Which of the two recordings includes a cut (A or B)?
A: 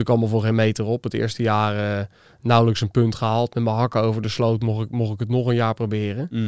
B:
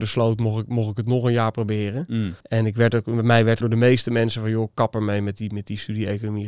B